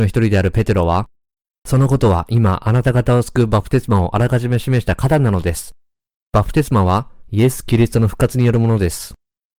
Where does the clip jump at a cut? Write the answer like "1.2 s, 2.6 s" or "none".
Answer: none